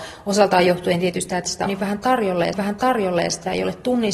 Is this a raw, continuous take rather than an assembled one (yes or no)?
no